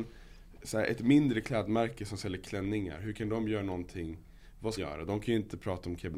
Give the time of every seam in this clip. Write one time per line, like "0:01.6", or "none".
0:04.8